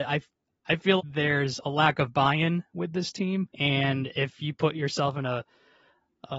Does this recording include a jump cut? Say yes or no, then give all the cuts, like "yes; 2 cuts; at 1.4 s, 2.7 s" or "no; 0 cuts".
yes; 2 cuts; at 1.0 s, 3.5 s